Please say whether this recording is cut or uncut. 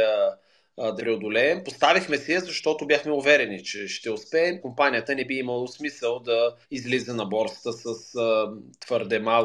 cut